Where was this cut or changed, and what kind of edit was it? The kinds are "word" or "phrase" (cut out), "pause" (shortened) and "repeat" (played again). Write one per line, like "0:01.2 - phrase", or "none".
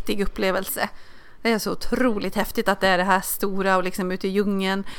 none